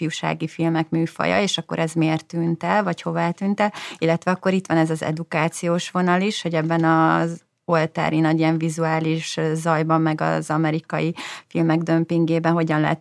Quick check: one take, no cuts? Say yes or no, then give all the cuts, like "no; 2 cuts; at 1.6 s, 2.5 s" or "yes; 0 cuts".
yes; 0 cuts